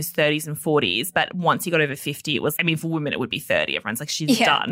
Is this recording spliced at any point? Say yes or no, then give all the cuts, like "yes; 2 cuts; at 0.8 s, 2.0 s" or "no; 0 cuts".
yes; 1 cut; at 2.6 s